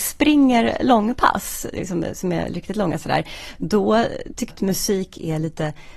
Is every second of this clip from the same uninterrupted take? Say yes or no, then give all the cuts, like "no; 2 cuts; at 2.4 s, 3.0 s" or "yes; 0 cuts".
no; 1 cut; at 4.5 s